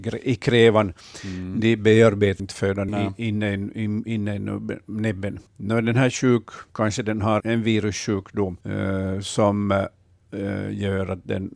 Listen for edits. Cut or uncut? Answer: cut